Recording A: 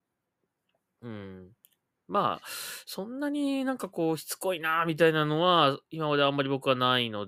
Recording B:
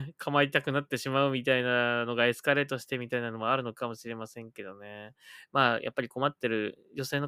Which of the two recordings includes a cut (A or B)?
A